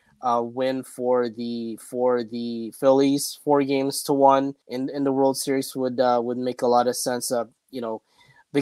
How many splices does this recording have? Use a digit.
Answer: 2